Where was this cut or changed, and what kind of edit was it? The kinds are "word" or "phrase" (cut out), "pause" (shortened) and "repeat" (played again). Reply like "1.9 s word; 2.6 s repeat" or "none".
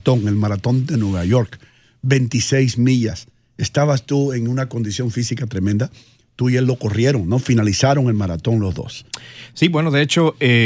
none